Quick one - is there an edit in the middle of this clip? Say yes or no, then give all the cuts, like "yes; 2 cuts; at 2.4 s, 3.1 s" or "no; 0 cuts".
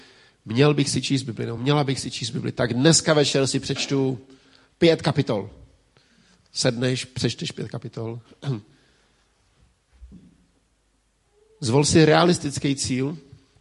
no; 0 cuts